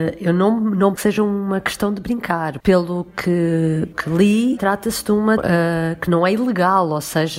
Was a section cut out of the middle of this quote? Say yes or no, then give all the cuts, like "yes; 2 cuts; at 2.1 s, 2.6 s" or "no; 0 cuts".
yes; 5 cuts; at 1.0 s, 2.6 s, 3.9 s, 4.6 s, 5.4 s